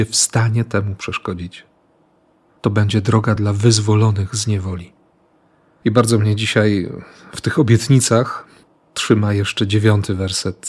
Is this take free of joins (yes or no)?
yes